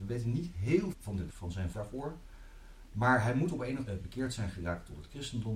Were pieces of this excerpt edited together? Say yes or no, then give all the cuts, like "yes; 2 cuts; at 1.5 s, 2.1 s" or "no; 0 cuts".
yes; 4 cuts; at 0.9 s, 1.3 s, 1.7 s, 3.9 s